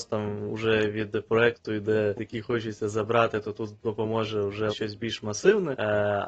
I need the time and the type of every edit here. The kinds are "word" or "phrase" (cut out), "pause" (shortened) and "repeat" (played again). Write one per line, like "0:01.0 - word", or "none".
0:02.2 - phrase
0:04.7 - word